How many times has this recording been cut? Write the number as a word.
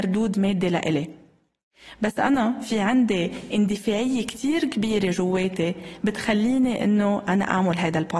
zero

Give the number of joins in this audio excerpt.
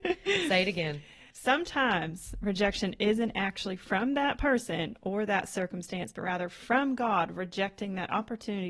one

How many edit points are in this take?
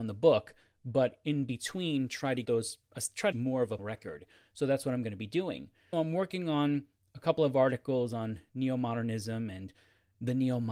four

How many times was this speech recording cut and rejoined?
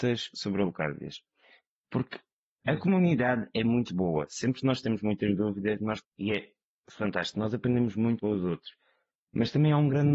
two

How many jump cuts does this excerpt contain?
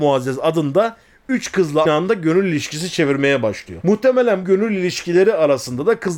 two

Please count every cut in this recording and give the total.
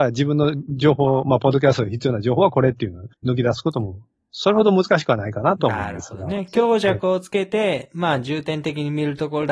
one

